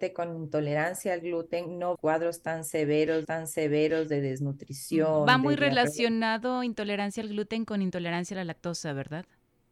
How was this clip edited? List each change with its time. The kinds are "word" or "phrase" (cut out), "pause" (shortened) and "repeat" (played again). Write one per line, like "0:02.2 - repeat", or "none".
0:02.0 - phrase
0:03.2 - repeat